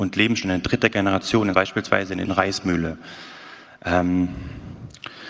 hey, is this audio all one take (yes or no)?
no